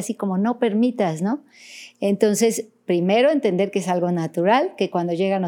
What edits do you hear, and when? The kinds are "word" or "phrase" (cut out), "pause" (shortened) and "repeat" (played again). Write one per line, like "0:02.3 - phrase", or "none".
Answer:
none